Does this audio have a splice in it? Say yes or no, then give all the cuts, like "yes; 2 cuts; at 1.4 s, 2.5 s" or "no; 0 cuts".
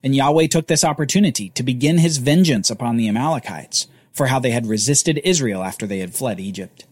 no; 0 cuts